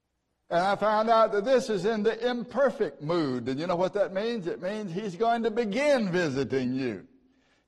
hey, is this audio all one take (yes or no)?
yes